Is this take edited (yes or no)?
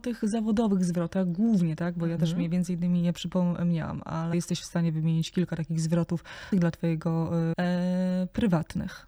yes